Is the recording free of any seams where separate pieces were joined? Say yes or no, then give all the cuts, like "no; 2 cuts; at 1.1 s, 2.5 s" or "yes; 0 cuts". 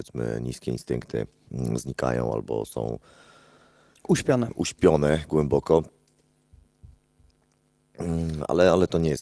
yes; 0 cuts